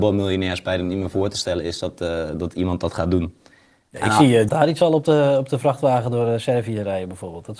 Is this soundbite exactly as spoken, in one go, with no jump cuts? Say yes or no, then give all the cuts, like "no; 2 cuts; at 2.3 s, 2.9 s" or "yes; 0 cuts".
no; 1 cut; at 4.5 s